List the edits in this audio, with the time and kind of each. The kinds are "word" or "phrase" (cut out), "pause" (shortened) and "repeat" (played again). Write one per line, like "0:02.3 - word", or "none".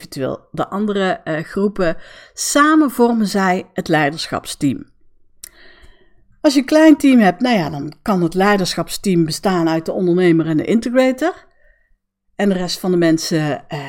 none